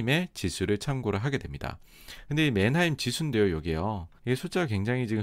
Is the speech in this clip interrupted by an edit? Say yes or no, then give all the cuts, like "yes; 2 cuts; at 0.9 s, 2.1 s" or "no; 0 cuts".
yes; 1 cut; at 4.2 s